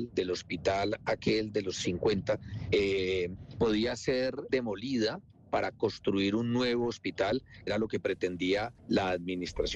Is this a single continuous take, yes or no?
no